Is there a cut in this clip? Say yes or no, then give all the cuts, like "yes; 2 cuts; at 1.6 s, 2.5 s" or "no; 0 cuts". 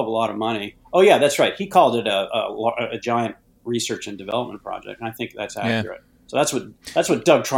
no; 0 cuts